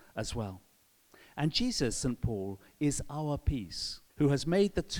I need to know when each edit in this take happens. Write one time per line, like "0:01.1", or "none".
0:01.9
0:04.1